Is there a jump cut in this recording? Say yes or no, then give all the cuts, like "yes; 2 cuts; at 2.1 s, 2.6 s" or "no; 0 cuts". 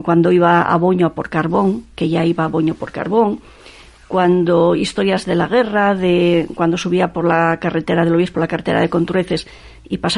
no; 0 cuts